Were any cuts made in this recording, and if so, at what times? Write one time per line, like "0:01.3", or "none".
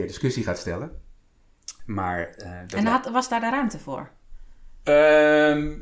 none

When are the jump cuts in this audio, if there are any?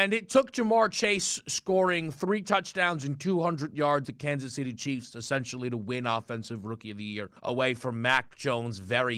0:04.0
0:07.4

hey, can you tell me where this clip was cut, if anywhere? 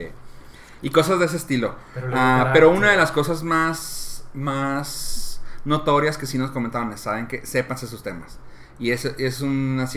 none

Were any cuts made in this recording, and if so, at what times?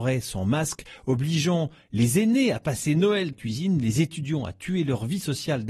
0:03.3

